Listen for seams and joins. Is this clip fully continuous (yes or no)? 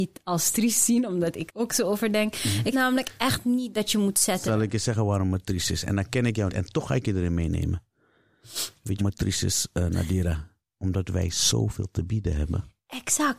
no